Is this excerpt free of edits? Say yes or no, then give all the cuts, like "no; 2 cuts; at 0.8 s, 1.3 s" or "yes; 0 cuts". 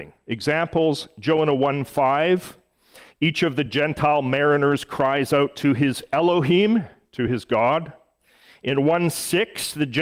yes; 0 cuts